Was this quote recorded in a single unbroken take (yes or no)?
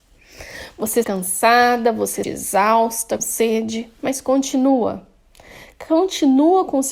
no